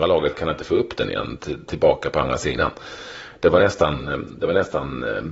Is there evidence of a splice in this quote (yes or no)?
no